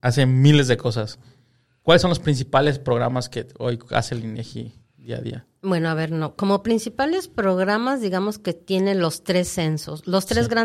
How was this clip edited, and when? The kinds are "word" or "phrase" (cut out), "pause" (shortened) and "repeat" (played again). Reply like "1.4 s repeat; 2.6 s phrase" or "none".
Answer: none